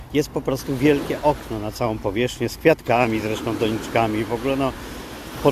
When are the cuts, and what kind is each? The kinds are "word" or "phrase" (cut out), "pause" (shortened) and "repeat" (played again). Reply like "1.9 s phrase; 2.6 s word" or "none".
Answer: none